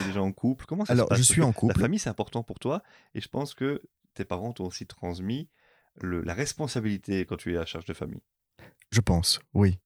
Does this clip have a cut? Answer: no; 0 cuts

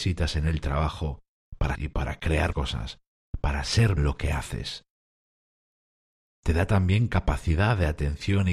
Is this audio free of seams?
no; 3 cuts; at 1.7 s, 2.5 s, 4.0 s

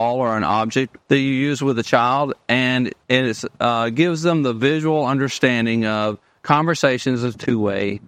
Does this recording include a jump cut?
yes; 2 cuts; at 1.0 s, 3.0 s

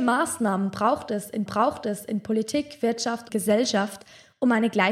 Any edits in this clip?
yes; 2 cuts; at 1.5 s, 3.3 s

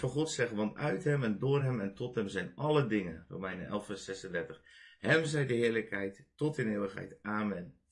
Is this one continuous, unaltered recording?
yes; 0 cuts

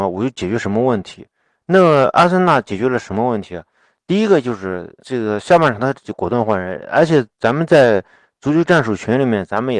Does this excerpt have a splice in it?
yes; 1 cut; at 5.0 s

